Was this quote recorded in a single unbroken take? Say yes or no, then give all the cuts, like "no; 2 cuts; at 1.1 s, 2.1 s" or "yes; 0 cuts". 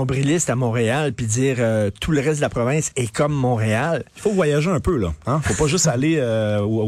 yes; 0 cuts